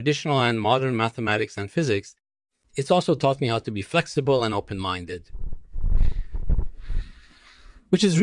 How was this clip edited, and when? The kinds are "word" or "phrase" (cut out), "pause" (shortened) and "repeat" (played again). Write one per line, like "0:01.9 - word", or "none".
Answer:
none